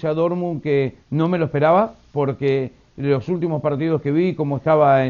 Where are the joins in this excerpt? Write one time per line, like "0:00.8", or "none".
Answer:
0:01.0